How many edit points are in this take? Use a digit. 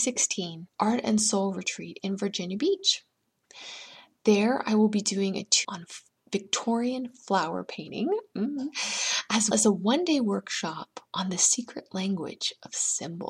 3